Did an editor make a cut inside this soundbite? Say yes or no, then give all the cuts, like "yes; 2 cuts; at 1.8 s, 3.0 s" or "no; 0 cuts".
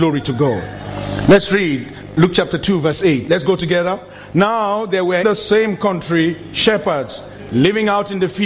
yes; 1 cut; at 5.2 s